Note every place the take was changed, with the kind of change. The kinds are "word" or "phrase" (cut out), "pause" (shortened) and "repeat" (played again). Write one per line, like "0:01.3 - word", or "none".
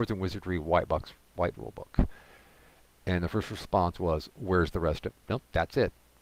0:01.5 - word
0:05.1 - word